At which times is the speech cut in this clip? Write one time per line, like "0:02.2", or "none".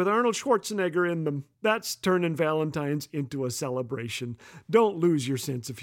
0:01.5